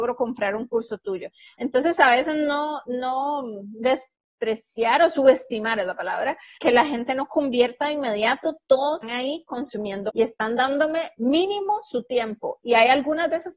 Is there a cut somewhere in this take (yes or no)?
yes